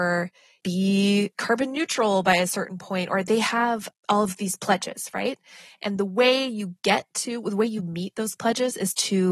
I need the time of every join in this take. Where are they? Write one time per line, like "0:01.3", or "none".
none